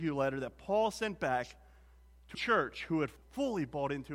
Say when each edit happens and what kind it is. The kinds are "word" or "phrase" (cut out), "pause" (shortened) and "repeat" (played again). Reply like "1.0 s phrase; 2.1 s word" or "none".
2.3 s word; 3.2 s word